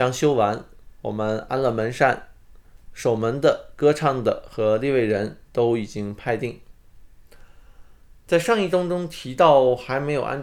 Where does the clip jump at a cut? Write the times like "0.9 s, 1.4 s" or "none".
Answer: 5.4 s, 8.2 s